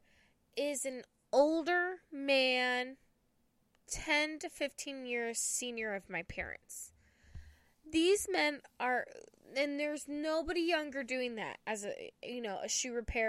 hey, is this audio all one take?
yes; 0 cuts

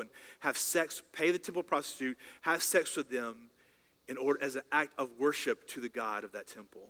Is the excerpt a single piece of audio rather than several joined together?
yes; 0 cuts

